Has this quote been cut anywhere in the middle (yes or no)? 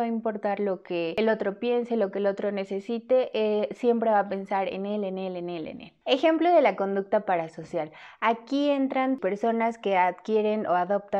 no